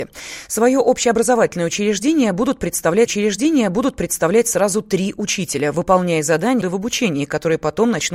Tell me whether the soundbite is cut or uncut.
cut